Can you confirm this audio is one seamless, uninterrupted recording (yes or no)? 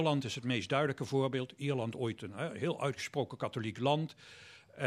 yes